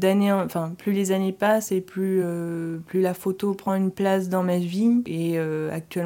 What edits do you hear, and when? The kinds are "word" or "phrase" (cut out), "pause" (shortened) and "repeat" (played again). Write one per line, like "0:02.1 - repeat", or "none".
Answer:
none